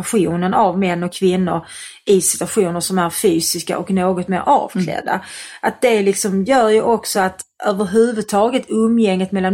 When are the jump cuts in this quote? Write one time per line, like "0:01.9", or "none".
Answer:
none